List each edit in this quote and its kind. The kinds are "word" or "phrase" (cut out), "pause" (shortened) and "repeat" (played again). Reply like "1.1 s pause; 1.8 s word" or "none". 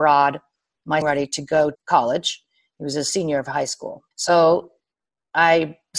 1.0 s phrase; 1.7 s word; 4.1 s pause